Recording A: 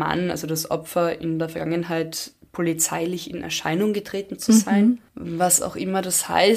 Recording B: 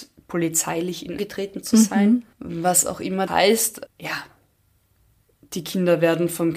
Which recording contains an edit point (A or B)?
B